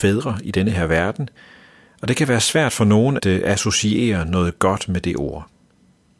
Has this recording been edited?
yes; 1 cut; at 3.2 s

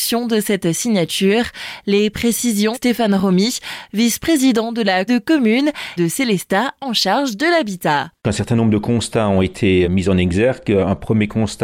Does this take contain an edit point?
yes; 5 cuts; at 2.7 s, 5.1 s, 6.0 s, 8.2 s, 9.8 s

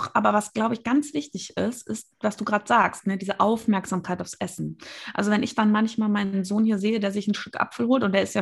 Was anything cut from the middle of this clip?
no; 0 cuts

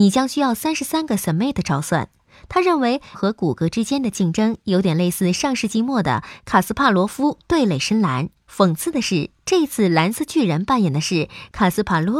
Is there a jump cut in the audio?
yes; 1 cut; at 3.1 s

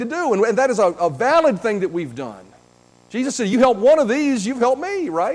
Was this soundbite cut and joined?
no; 0 cuts

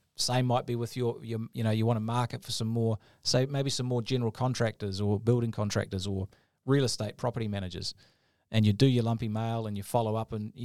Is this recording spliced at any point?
no; 0 cuts

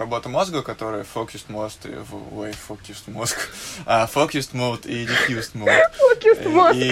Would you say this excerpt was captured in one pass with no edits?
yes; 0 cuts

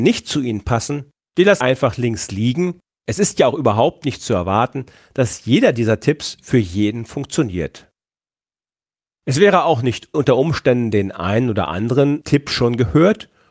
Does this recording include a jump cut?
yes; 2 cuts; at 1.6 s, 10.1 s

